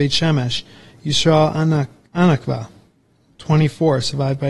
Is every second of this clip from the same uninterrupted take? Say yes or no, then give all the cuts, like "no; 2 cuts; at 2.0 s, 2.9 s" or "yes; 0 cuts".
yes; 0 cuts